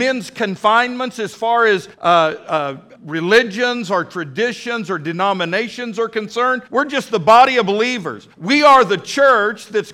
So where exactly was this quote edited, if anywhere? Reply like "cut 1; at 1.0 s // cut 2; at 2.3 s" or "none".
cut 1; at 1.9 s // cut 2; at 2.9 s // cut 3; at 6.7 s // cut 4; at 8.3 s